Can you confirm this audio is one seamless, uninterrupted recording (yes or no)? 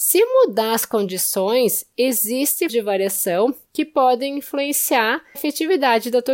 no